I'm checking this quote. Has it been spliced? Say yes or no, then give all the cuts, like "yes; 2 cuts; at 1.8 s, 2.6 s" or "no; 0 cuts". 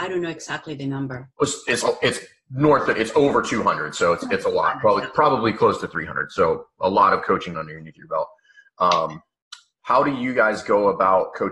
yes; 1 cut; at 7.5 s